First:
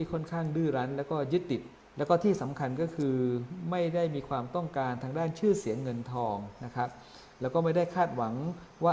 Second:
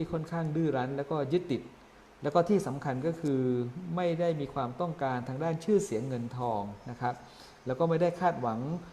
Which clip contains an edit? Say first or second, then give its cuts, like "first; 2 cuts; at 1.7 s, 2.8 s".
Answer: first; 1 cut; at 1.7 s